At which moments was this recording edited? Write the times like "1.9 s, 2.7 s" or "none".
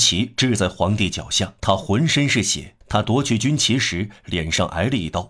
1.6 s, 2.8 s

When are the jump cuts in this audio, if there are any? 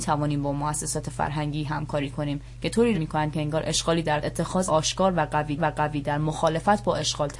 2.9 s, 4.2 s, 4.7 s, 5.6 s

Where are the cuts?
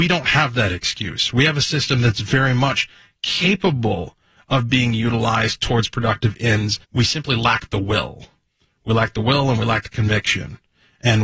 6.8 s

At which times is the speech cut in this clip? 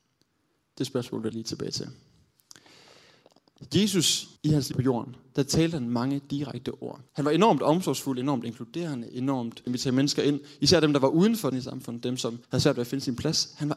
1.3 s, 4.4 s, 4.7 s, 7.1 s, 9.7 s, 11.5 s, 12.4 s

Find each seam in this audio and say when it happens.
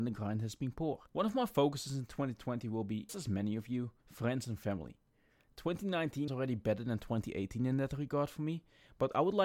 1.1 s, 3.1 s, 4.0 s, 6.3 s

